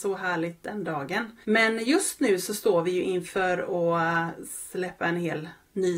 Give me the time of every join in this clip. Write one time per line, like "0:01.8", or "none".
0:01.4